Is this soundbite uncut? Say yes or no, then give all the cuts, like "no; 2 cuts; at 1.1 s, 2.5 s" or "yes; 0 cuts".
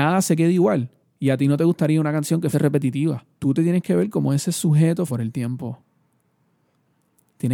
no; 4 cuts; at 1.0 s, 2.5 s, 3.3 s, 5.1 s